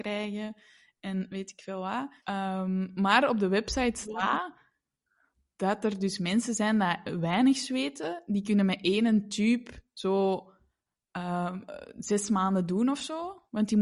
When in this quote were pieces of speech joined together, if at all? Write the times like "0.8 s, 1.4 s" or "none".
2.2 s